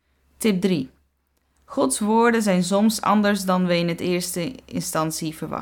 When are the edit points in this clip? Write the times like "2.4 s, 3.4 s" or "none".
none